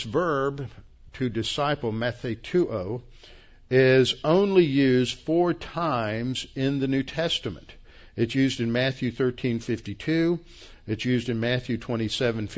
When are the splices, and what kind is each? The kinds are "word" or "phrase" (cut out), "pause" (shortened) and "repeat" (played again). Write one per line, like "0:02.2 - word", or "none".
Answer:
none